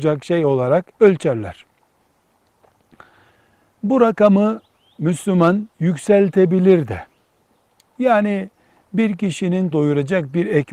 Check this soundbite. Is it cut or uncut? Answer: cut